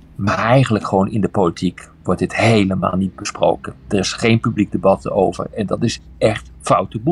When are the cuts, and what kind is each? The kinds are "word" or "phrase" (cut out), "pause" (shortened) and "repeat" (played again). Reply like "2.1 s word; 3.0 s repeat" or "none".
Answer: none